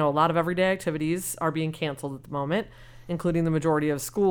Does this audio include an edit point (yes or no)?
no